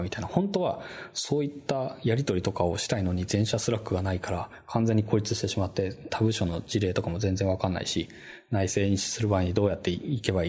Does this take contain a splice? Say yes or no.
yes